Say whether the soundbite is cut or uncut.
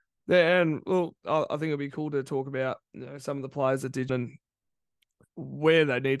cut